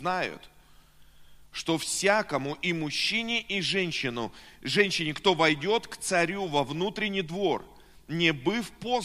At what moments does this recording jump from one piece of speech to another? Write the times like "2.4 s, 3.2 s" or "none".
none